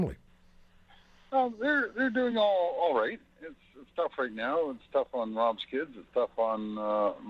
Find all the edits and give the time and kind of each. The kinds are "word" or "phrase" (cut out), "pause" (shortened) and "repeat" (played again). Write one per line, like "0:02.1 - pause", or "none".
none